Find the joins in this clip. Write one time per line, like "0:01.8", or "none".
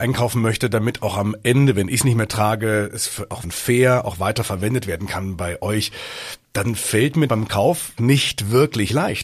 0:03.4
0:07.3
0:08.0